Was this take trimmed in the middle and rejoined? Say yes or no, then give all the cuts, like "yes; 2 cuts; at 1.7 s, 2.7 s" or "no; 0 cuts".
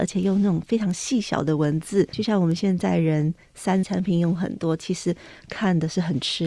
yes; 2 cuts; at 2.1 s, 3.8 s